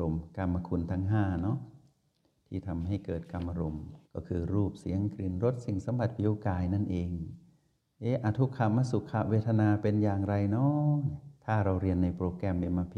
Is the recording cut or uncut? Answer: cut